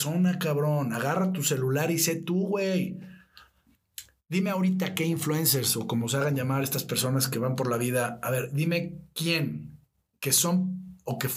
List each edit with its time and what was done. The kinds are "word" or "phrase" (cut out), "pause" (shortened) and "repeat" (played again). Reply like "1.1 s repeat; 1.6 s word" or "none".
none